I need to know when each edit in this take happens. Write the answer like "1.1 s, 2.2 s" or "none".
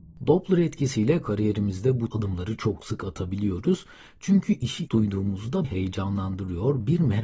2.1 s, 4.9 s, 5.6 s